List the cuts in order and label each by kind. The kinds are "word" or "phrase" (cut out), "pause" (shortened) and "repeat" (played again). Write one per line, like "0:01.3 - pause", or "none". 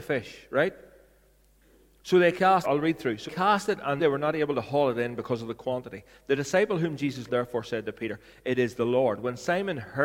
0:02.6 - word
0:03.3 - word
0:04.0 - word
0:07.3 - word